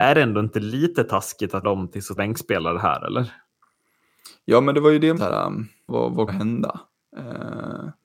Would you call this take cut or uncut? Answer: cut